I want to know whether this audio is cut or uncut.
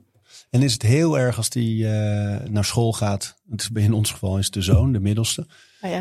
uncut